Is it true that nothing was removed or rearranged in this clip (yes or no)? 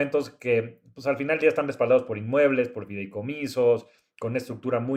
yes